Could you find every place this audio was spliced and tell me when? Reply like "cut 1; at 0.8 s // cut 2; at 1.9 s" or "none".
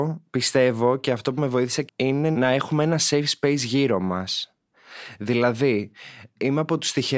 cut 1; at 1.9 s